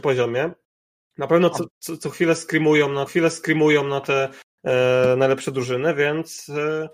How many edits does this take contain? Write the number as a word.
two